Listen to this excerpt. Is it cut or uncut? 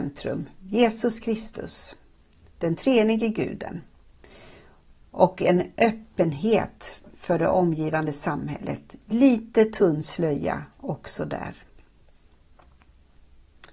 uncut